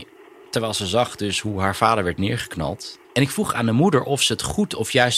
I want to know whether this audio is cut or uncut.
cut